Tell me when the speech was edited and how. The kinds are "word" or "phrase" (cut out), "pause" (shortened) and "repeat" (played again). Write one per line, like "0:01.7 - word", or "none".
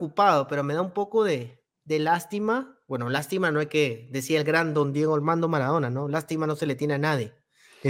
0:01.7 - pause